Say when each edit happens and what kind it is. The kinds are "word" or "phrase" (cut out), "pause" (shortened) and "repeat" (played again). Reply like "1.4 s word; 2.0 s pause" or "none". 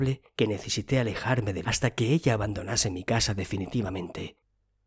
1.6 s word